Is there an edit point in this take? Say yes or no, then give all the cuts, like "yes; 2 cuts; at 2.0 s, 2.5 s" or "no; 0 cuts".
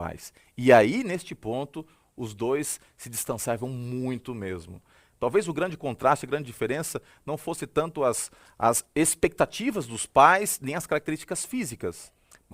no; 0 cuts